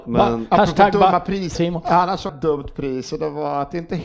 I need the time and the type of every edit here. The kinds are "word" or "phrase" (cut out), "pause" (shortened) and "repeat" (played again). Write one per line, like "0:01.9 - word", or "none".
0:01.5 - phrase
0:02.3 - phrase